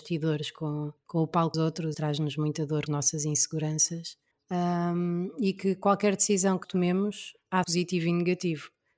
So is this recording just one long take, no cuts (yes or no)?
no